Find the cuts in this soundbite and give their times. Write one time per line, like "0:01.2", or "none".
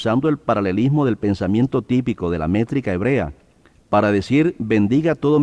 none